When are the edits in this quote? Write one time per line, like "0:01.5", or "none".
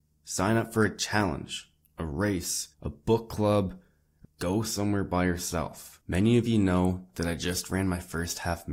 0:02.7
0:04.2
0:06.0

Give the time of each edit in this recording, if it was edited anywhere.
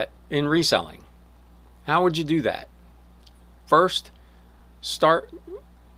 none

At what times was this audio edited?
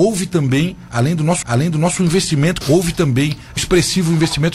0:01.4
0:02.6
0:03.6

